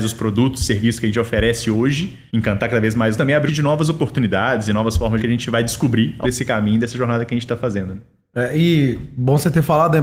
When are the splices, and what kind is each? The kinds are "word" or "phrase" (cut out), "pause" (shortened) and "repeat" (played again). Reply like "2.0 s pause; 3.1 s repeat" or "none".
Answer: 2.3 s pause; 3.1 s phrase; 3.5 s phrase; 5.2 s phrase; 6.2 s word